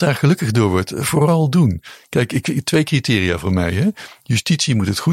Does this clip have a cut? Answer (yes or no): no